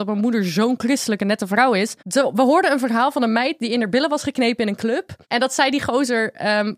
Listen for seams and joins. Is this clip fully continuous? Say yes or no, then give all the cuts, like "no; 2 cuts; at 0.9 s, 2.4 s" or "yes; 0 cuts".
no; 2 cuts; at 2.0 s, 5.2 s